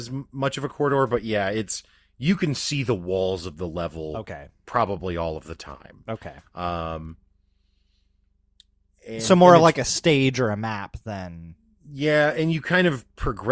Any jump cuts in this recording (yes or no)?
no